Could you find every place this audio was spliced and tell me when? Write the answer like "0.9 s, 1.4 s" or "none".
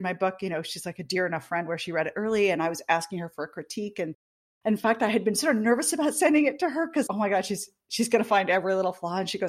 7.1 s

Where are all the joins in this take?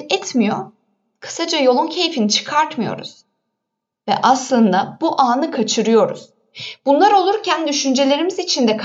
none

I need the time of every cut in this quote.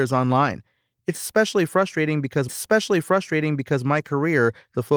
2.5 s

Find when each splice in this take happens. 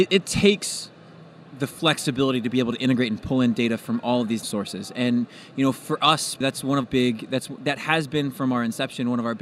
4.4 s, 6.4 s, 6.8 s

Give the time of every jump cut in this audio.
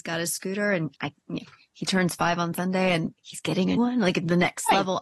3.8 s

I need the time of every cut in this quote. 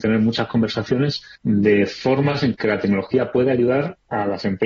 1.4 s

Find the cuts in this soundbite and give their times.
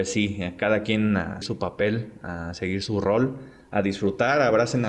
1.4 s

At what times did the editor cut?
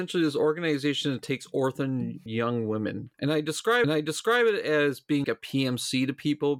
2.3 s, 3.1 s, 3.8 s, 5.2 s

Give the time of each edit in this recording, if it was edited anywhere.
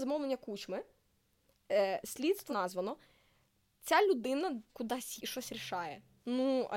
2.5 s, 4.7 s, 5.2 s

